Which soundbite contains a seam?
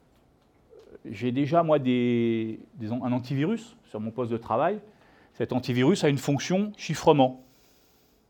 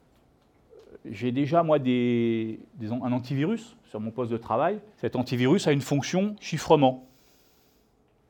second; 1 cut; at 4.9 s

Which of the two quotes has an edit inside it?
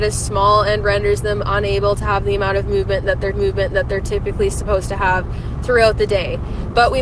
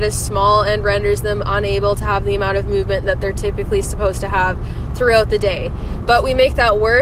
first; 1 cut; at 3.3 s

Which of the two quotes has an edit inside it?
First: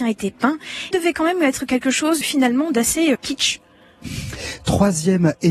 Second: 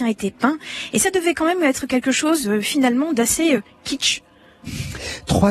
first; 3 cuts; at 0.9 s, 2.2 s, 3.1 s

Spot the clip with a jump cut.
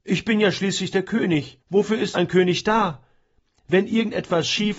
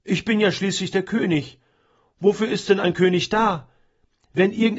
first; 2 cuts; at 1.6 s, 2.1 s

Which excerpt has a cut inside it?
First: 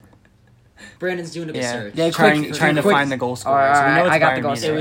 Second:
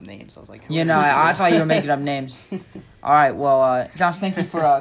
first; 2 cuts; at 1.0 s, 1.5 s

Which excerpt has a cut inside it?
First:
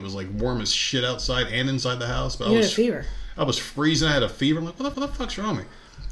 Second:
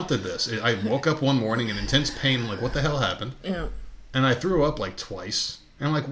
first; 1 cut; at 4.9 s

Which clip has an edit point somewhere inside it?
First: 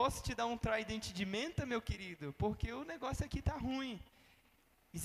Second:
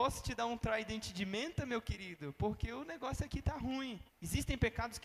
second; 1 cut; at 4.1 s

